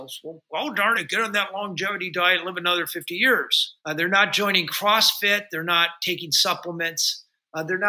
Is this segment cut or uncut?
cut